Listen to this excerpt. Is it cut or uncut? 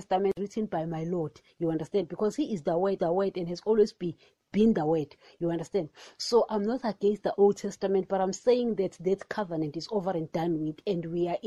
cut